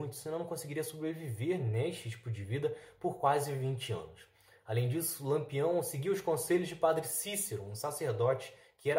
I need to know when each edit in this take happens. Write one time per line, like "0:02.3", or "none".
none